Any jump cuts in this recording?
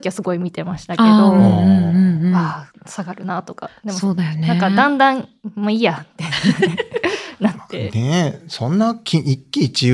no; 0 cuts

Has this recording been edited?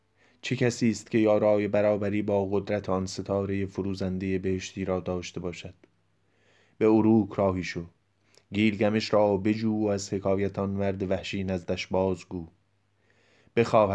no; 0 cuts

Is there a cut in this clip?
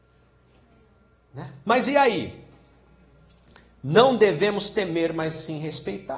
yes; 1 cut; at 1.6 s

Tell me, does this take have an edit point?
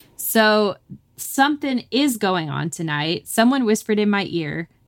no; 0 cuts

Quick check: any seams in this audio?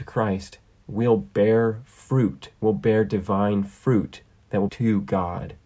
yes; 1 cut; at 4.7 s

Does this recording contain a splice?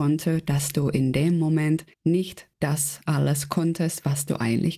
yes; 1 cut; at 1.9 s

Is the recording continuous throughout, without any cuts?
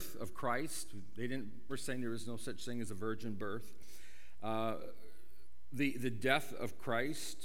no; 1 cut; at 1.7 s

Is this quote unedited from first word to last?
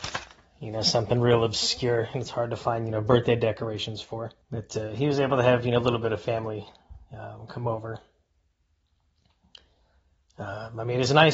no; 1 cut; at 4.4 s

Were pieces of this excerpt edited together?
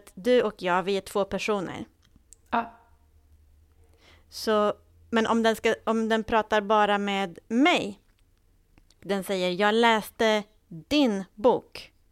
yes; 1 cut; at 9.0 s

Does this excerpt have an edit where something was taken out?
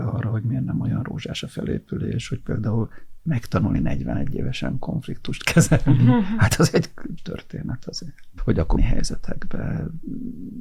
yes; 3 cuts; at 7.2 s, 8.4 s, 8.8 s

